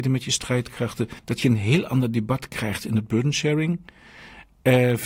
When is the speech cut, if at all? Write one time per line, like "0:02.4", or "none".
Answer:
0:01.2